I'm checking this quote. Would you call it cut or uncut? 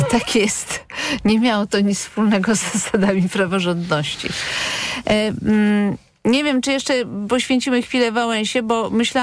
uncut